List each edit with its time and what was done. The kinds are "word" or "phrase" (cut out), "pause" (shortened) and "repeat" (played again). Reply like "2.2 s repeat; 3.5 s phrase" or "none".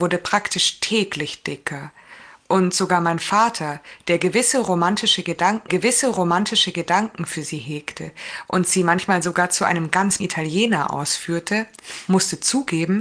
5.7 s repeat; 10.2 s word